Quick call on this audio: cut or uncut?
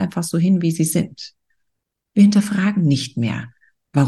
uncut